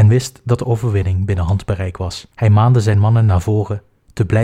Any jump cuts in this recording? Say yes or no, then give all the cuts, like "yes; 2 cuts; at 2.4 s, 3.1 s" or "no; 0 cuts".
yes; 1 cut; at 2.3 s